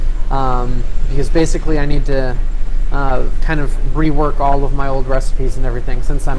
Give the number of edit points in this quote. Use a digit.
0